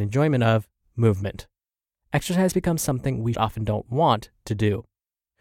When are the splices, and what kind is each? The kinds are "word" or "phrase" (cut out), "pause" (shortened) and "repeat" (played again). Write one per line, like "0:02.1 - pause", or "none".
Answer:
0:03.3 - phrase